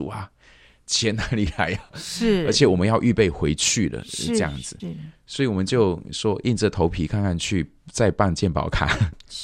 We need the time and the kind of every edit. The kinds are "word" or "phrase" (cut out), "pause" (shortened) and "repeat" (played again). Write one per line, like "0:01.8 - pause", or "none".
0:04.8 - word